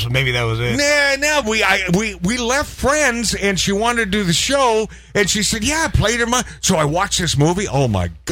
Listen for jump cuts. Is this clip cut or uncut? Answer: cut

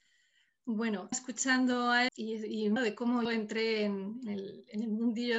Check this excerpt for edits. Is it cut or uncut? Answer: cut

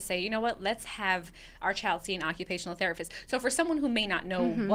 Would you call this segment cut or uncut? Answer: uncut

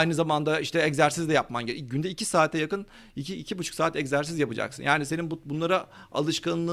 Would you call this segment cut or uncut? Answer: uncut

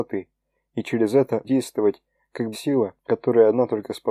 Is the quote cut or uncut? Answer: cut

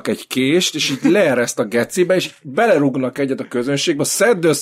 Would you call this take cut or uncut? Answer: uncut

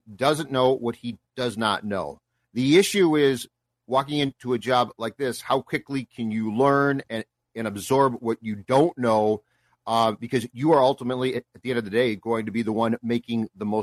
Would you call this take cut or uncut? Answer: uncut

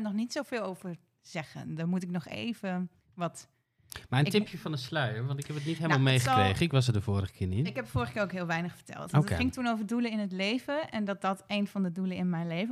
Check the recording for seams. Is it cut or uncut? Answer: uncut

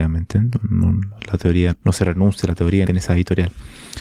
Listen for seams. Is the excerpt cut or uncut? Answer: cut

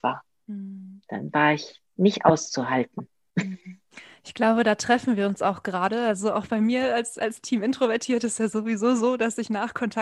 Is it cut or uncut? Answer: uncut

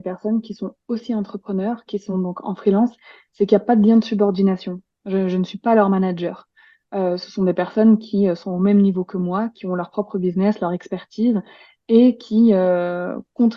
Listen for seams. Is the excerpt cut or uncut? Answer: uncut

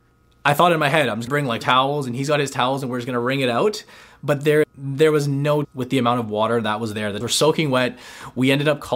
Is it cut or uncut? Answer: cut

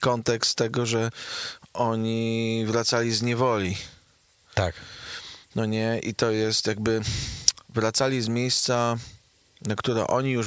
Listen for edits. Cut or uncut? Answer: uncut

